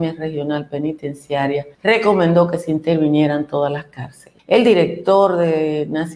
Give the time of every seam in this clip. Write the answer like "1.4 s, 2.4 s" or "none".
1.7 s, 4.4 s